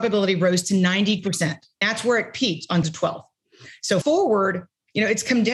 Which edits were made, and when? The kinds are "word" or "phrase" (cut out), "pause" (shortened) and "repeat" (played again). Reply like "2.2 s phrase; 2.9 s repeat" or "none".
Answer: 1.2 s word; 1.8 s word; 2.8 s word; 4.0 s word